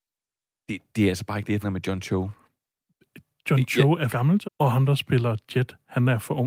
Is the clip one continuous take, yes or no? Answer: no